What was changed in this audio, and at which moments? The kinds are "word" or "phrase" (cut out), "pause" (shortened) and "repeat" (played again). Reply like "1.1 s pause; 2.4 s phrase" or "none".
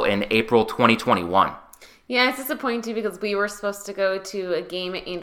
none